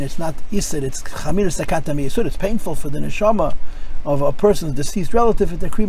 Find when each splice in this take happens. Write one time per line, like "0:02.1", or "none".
none